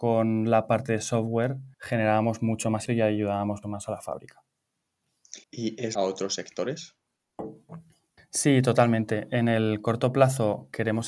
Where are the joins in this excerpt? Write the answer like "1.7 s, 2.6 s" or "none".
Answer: 1.7 s, 2.9 s, 3.6 s, 5.4 s, 6.0 s, 8.2 s